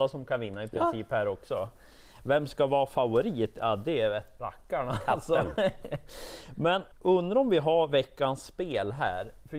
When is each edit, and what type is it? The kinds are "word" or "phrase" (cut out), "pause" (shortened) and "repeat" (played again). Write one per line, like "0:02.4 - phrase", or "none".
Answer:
0:04.4 - word
0:06.9 - pause